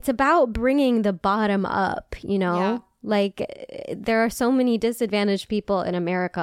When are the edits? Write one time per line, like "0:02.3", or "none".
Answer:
none